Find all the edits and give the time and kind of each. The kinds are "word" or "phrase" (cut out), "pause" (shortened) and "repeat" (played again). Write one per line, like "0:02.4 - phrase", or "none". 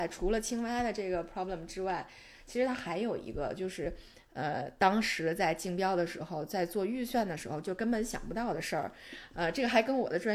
none